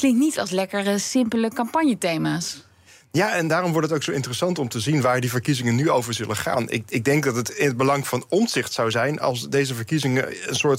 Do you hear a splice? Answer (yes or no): no